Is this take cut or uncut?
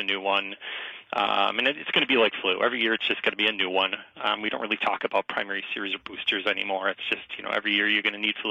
uncut